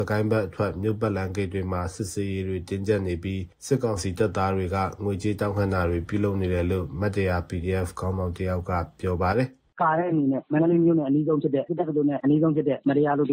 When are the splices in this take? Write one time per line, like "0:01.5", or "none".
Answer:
none